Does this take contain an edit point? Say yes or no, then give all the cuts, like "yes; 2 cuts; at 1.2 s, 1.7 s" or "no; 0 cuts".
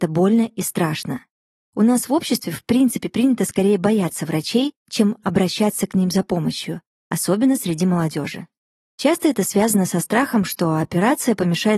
no; 0 cuts